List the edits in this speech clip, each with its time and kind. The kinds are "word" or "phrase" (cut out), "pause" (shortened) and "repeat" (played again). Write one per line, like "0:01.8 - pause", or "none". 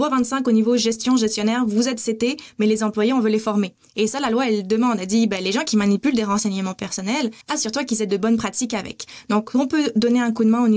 0:07.4 - pause